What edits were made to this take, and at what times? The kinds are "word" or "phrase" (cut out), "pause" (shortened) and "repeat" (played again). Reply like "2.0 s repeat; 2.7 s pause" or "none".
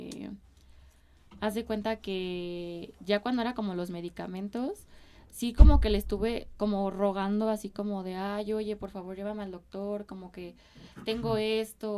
none